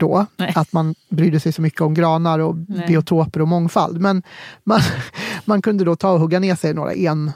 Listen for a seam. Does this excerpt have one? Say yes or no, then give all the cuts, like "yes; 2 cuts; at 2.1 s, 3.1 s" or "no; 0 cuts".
no; 0 cuts